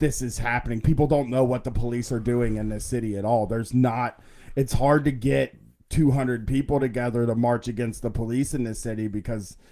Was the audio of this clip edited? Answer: no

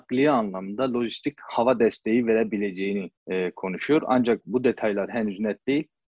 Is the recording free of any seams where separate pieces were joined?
no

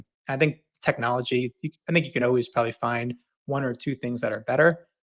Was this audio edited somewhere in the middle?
no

